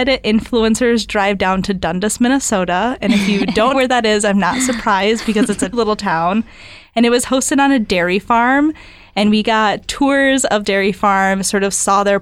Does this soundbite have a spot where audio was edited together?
yes; 3 cuts; at 3.7 s, 5.7 s, 10.6 s

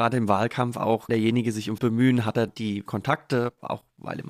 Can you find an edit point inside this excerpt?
yes; 4 cuts; at 1.1 s, 1.8 s, 2.5 s, 2.9 s

